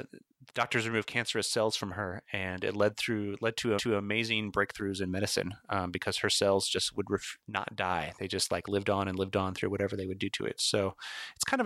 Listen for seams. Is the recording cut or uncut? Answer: cut